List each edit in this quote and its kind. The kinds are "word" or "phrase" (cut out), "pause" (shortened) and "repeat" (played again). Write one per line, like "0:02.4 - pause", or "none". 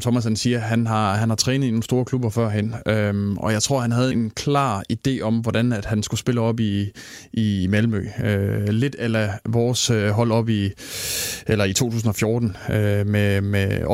0:04.1 - word